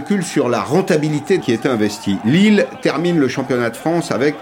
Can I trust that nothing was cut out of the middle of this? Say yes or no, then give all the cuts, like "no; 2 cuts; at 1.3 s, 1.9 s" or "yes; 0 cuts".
no; 1 cut; at 1.4 s